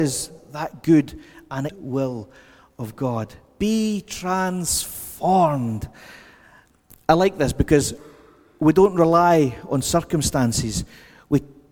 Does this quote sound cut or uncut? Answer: cut